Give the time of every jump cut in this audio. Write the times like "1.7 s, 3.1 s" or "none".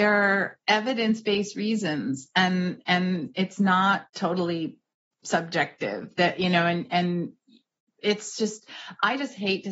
none